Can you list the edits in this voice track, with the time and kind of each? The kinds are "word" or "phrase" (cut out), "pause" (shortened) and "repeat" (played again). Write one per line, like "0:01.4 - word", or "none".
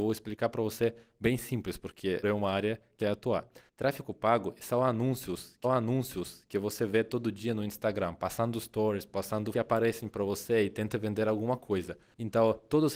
0:02.2 - word
0:03.0 - phrase
0:05.6 - repeat
0:09.5 - phrase